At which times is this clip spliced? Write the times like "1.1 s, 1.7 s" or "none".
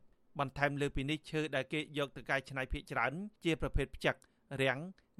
3.4 s